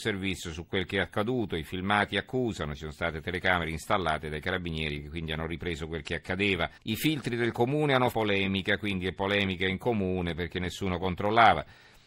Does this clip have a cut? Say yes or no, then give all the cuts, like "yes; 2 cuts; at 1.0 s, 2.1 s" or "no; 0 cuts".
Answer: yes; 2 cuts; at 6.8 s, 8.1 s